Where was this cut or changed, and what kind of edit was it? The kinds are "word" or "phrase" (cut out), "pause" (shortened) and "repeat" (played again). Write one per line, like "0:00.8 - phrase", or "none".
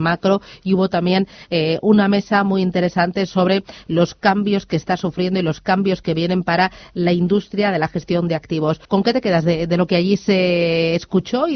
0:08.8 - pause